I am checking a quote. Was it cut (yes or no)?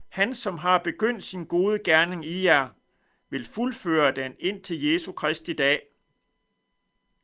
no